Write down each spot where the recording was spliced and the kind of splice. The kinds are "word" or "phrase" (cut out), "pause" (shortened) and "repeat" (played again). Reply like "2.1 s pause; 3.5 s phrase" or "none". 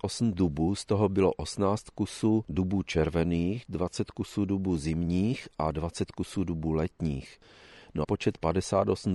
8.0 s phrase